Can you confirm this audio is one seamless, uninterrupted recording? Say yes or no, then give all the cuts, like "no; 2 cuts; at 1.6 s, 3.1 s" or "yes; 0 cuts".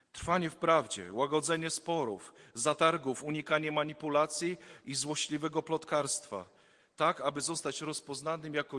yes; 0 cuts